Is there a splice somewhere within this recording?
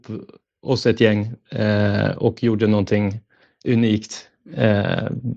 no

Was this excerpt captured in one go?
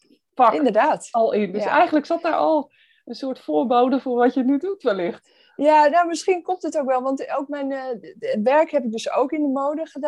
yes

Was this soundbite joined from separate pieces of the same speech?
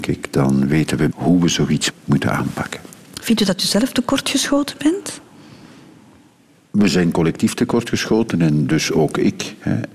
yes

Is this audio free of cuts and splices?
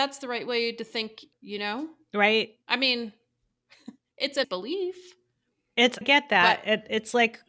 no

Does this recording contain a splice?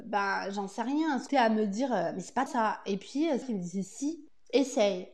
yes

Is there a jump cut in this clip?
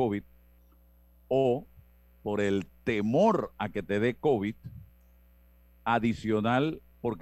no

